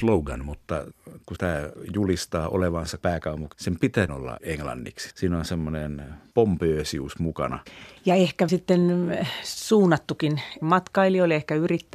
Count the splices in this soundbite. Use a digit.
4